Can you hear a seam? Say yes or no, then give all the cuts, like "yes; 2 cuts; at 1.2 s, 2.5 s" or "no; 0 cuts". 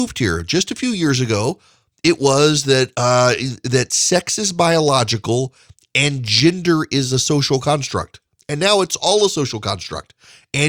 no; 0 cuts